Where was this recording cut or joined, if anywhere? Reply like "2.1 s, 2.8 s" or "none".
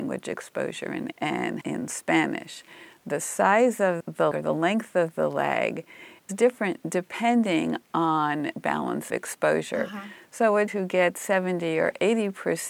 1.1 s, 1.6 s, 4.0 s, 4.3 s, 6.3 s, 8.5 s, 9.1 s, 10.7 s

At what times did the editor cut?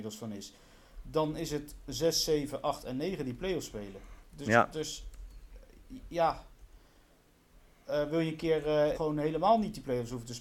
8.9 s

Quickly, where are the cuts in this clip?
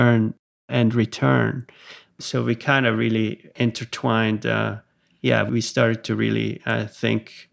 none

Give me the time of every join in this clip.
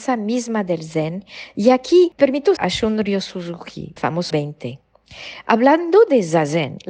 2.2 s, 2.6 s, 4.0 s, 4.3 s

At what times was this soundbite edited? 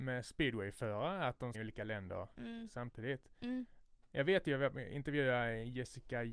1.5 s

